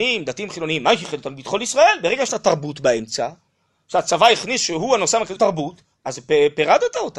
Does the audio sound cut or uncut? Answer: cut